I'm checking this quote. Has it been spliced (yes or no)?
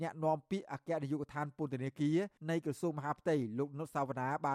yes